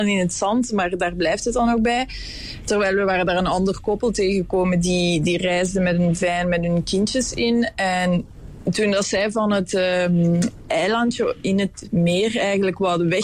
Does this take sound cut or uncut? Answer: uncut